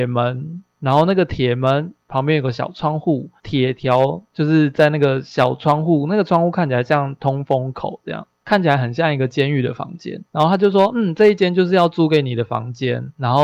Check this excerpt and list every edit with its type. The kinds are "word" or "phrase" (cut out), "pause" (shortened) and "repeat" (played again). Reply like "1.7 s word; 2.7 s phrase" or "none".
10.3 s pause